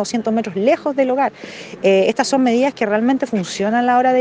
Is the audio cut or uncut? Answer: uncut